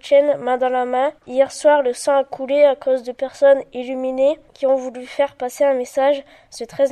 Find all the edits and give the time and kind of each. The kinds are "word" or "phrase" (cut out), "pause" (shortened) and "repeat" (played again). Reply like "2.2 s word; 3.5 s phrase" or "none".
1.2 s pause; 4.5 s pause

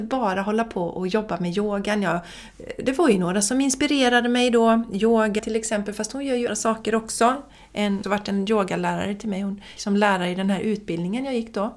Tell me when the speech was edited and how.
5.4 s word; 6.5 s word; 8.0 s word; 9.8 s word

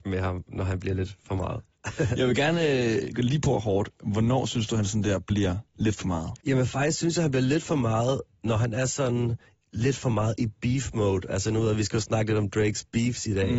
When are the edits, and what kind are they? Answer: 6.4 s pause

